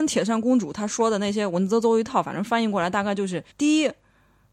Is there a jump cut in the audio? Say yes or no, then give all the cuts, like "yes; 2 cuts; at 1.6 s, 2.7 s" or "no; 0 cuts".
yes; 1 cut; at 3.5 s